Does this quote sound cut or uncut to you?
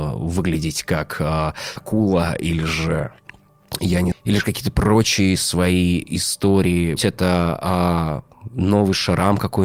cut